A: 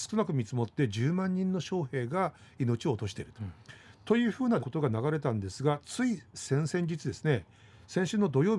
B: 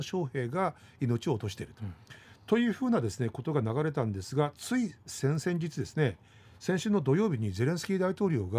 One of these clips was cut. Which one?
A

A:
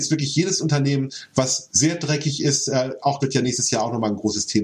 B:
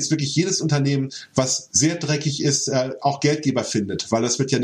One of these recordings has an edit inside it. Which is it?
A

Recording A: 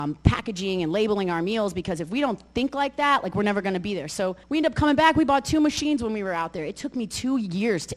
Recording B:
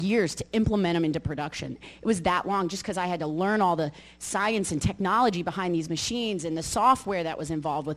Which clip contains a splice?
A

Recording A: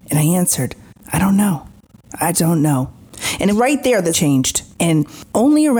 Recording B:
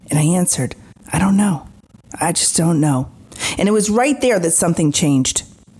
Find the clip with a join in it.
A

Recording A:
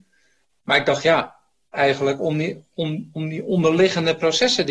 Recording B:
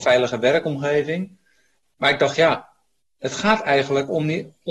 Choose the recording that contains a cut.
A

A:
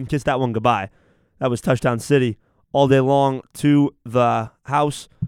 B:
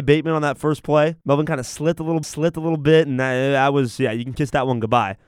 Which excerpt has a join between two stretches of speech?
B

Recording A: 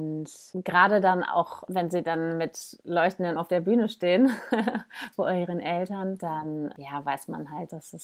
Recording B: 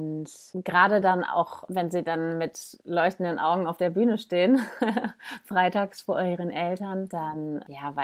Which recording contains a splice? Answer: A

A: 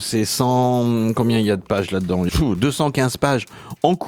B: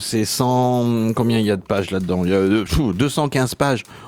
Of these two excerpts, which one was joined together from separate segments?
A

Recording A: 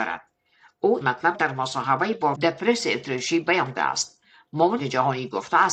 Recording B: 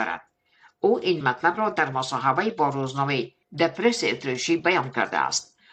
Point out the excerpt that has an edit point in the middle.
A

